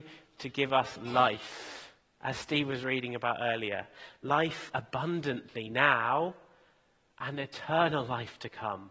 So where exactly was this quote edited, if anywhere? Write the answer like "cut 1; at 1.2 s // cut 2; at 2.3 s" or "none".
none